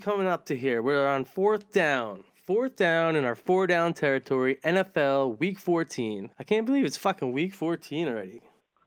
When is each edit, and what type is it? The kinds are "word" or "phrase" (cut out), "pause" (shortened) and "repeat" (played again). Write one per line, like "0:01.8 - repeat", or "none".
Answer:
0:02.3 - pause
0:06.3 - pause